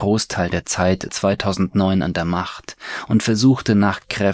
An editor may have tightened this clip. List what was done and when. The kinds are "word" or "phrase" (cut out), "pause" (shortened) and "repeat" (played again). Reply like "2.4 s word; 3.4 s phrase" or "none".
1.1 s word